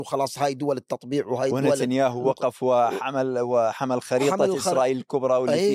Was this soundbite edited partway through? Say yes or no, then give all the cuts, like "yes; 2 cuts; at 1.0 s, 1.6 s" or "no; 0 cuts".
no; 0 cuts